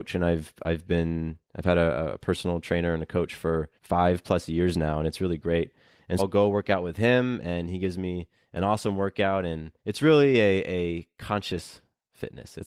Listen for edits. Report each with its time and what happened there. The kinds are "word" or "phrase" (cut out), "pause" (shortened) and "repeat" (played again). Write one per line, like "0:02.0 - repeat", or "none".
0:03.8 - pause
0:06.2 - word
0:09.8 - pause